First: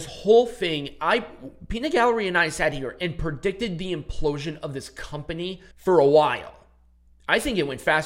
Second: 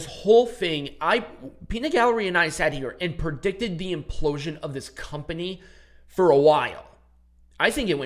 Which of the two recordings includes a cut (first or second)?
first